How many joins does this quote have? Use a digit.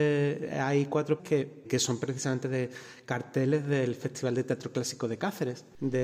2